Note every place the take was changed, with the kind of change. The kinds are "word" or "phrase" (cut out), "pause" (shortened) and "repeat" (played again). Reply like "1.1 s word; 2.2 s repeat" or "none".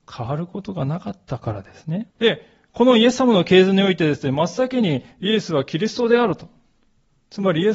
2.1 s pause